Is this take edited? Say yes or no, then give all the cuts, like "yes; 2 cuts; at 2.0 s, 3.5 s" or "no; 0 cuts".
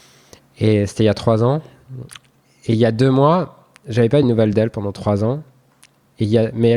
no; 0 cuts